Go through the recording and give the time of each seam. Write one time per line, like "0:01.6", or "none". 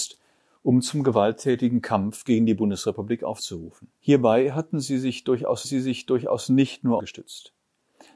0:04.0
0:05.6
0:07.0

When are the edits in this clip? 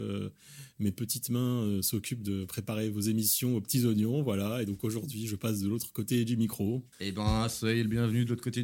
0:06.9

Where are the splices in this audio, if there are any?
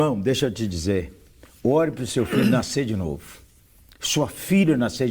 none

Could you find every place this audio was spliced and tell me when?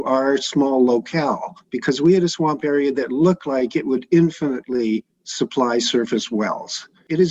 0:01.6
0:05.1

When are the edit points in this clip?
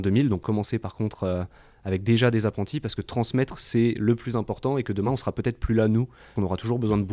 none

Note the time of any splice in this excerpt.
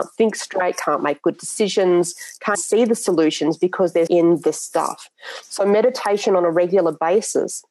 0:02.5
0:04.1

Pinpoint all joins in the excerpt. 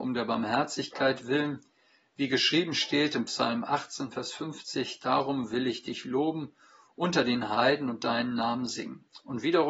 none

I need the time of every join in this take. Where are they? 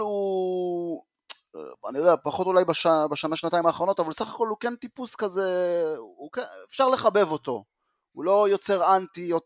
none

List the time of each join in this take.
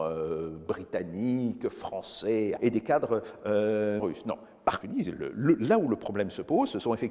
0:02.6
0:04.0
0:04.8

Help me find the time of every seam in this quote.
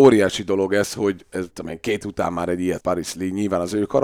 0:01.5
0:02.0
0:02.8

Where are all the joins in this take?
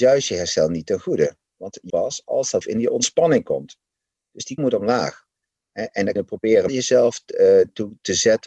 0:01.9
0:02.6
0:04.6
0:06.2
0:06.7

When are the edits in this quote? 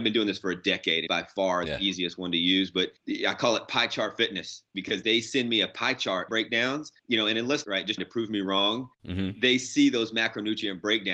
0:01.1
0:03.0
0:05.0
0:06.3
0:07.0
0:07.6
0:08.0
0:08.9

